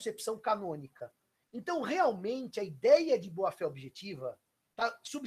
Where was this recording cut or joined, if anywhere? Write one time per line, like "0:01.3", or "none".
none